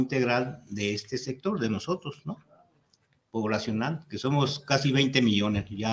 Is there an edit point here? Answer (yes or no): no